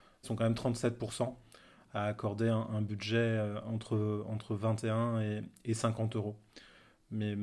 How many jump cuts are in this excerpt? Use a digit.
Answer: 0